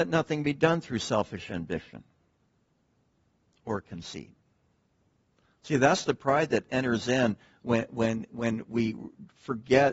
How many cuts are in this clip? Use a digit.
0